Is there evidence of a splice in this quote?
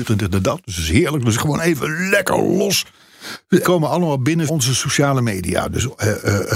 yes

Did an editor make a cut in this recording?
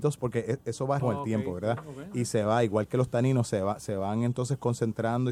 yes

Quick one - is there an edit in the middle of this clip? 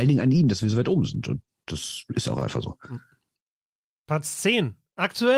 no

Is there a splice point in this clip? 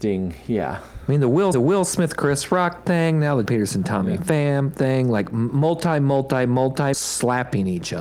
yes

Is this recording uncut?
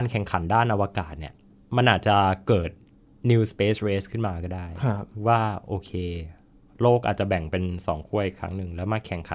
yes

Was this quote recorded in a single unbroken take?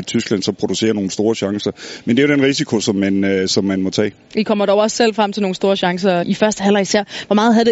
no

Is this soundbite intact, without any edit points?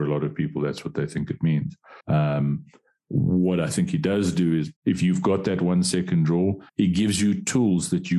no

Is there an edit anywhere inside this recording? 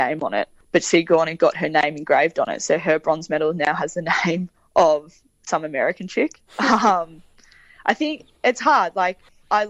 no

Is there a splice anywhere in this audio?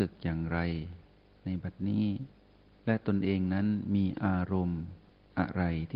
no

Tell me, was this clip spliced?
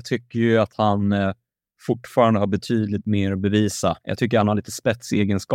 no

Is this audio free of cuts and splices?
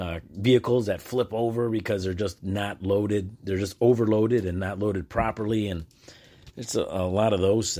yes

